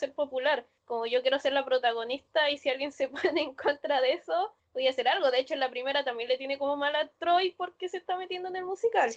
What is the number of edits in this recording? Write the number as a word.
zero